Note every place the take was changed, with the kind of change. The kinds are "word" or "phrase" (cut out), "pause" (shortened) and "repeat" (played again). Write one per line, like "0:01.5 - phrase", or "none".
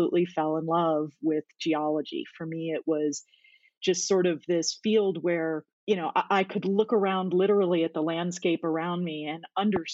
0:05.7 - pause